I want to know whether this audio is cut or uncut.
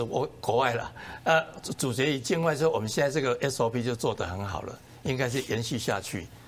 uncut